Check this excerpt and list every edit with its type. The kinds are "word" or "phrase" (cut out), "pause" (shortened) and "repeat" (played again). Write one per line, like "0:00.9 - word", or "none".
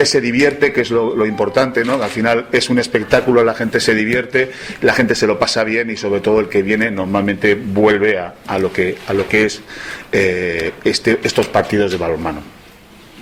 none

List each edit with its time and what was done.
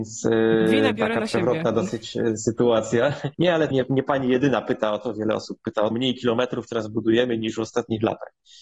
0:03.3 - pause
0:03.7 - word
0:05.9 - phrase

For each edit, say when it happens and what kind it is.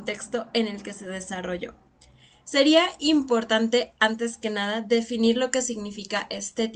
none

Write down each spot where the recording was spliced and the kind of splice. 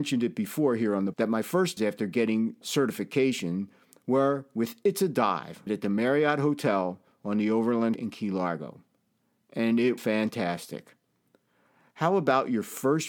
0:01.1 - word
0:01.8 - word
0:02.6 - word
0:05.7 - word
0:07.9 - word
0:10.0 - word

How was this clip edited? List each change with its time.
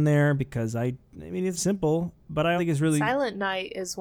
0:01.6 - word
0:02.2 - pause
0:02.6 - word

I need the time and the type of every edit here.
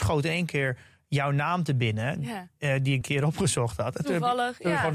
0:03.0 - phrase

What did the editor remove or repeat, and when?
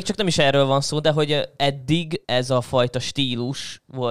0:02.2 - word

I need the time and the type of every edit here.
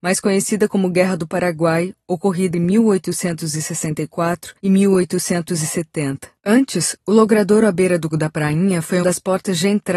0:02.5 - word
0:04.6 - pause
0:06.4 - pause
0:08.1 - word
0:09.0 - word

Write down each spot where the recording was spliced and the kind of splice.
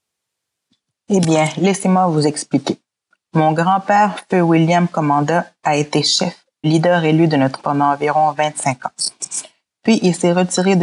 0:06.6 - word
0:07.6 - word

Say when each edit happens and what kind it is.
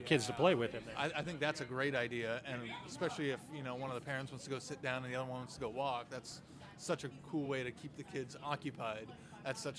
none

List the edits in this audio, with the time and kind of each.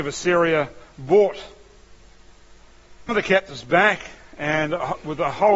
0:03.1 - word

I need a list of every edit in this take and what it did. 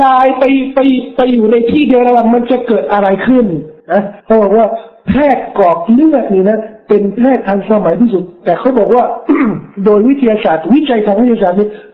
0:03.8 - pause
0:04.2 - pause

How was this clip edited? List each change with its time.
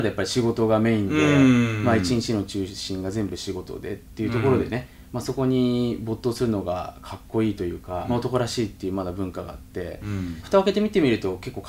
0:08.1 - phrase
0:10.4 - phrase

